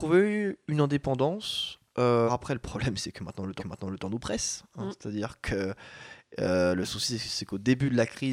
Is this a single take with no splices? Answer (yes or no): no